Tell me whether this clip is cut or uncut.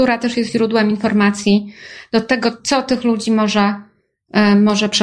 uncut